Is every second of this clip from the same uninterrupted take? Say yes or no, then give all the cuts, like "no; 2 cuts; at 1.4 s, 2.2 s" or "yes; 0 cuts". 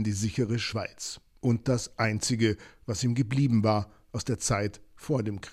yes; 0 cuts